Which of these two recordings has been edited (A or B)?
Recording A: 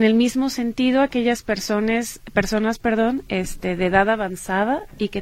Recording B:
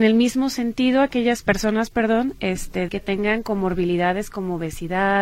B